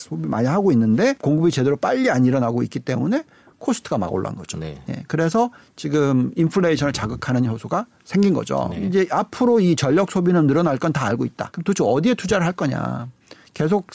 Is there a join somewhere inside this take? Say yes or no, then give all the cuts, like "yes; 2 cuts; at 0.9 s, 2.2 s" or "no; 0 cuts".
no; 0 cuts